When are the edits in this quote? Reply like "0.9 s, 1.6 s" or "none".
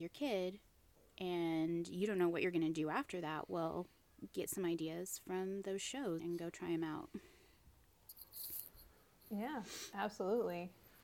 6.2 s